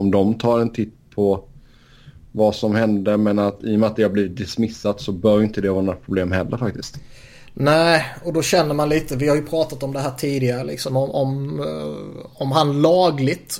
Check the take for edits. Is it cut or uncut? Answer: uncut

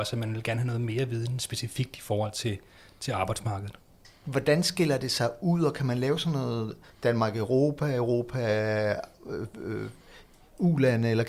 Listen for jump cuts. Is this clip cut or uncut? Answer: uncut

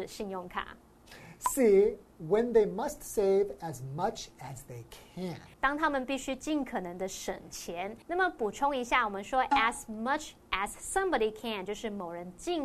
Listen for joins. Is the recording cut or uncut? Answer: cut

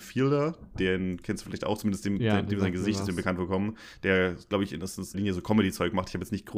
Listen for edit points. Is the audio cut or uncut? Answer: cut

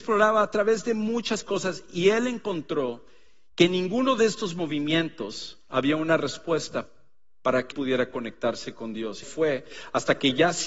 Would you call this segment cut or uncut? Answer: cut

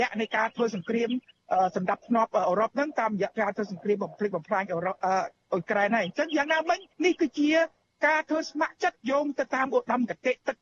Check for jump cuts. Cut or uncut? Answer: cut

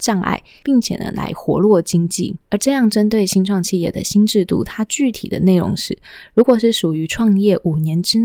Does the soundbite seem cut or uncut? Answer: cut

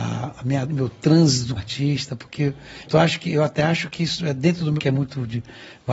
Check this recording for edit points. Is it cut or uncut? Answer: cut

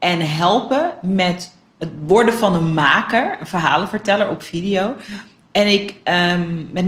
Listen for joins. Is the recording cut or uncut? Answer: uncut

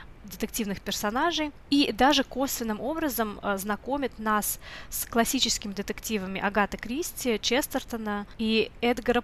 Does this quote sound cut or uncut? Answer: uncut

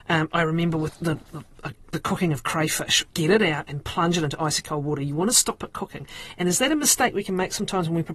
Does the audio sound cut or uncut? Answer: cut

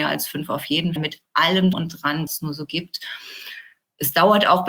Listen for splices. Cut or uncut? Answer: cut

